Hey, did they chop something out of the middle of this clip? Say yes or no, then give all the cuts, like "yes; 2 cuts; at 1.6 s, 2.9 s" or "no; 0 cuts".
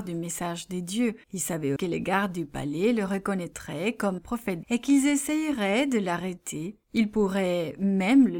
yes; 5 cuts; at 1.2 s, 1.8 s, 4.2 s, 4.6 s, 6.8 s